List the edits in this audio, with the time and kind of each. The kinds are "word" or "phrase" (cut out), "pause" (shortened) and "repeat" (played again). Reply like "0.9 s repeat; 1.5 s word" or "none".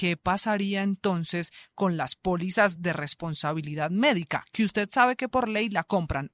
none